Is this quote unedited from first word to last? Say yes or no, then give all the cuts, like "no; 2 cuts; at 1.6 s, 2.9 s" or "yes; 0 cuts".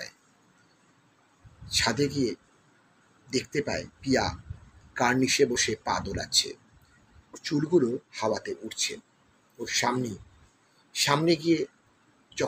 no; 2 cuts; at 3.9 s, 7.3 s